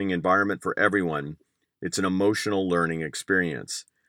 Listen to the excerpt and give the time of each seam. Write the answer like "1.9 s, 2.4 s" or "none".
none